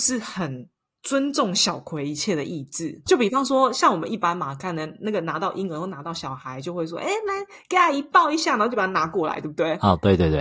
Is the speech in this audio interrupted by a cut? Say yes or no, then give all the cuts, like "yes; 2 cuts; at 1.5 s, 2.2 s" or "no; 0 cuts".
yes; 1 cut; at 3.1 s